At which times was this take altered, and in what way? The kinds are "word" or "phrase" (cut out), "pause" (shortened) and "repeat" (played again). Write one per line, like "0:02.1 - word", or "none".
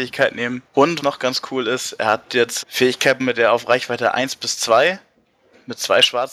0:01.0 - word
0:02.6 - word
0:03.2 - word